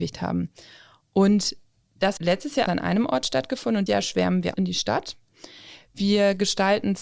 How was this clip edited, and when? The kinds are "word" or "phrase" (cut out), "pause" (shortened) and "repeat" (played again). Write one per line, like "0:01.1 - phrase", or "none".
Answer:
0:02.2 - word
0:02.7 - word
0:03.9 - word
0:04.5 - word

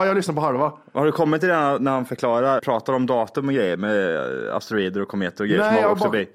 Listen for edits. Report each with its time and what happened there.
0:02.6 - word

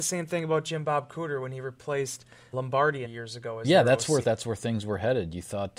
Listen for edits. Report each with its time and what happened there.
0:02.5 - word
0:03.0 - phrase
0:04.2 - word

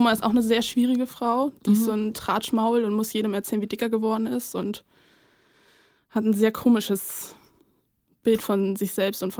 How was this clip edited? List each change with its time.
none

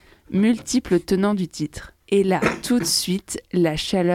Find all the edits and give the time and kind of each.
0:02.0 - pause

